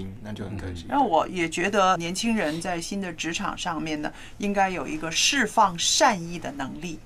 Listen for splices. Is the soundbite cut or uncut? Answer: cut